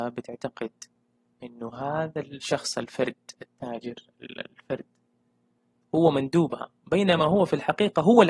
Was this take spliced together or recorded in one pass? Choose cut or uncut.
uncut